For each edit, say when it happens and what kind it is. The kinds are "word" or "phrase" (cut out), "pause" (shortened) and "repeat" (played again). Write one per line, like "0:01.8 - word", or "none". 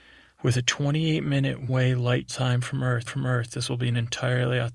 0:01.7 - word
0:02.3 - word
0:03.1 - repeat